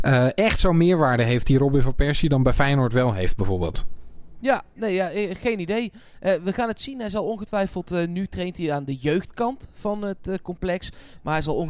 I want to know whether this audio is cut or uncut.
uncut